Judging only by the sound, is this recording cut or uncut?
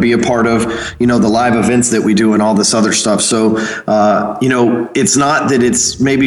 uncut